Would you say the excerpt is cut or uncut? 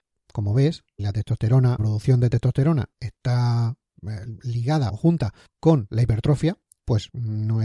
cut